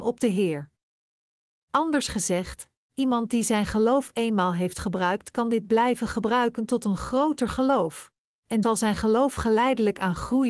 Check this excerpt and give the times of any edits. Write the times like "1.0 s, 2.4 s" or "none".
8.6 s